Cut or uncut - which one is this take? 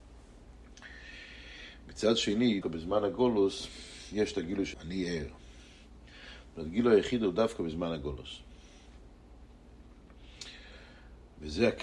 cut